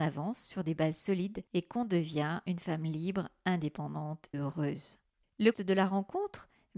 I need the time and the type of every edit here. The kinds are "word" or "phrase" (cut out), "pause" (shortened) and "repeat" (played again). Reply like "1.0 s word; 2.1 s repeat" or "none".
4.3 s word; 5.5 s word